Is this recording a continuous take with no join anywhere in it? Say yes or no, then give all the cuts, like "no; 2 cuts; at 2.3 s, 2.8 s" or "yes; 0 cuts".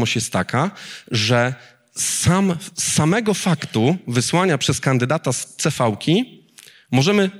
yes; 0 cuts